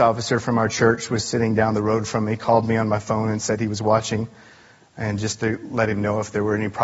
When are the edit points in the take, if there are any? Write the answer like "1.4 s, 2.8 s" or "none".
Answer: none